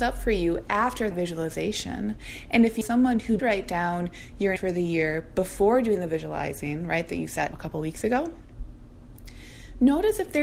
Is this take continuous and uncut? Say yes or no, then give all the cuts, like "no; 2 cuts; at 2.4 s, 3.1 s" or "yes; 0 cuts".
no; 6 cuts; at 1.1 s, 2.8 s, 3.4 s, 4.6 s, 7.1 s, 7.5 s